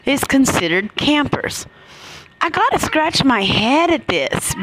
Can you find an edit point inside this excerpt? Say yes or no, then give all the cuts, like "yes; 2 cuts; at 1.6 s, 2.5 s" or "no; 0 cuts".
no; 0 cuts